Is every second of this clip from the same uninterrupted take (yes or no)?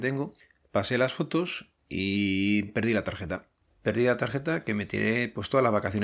no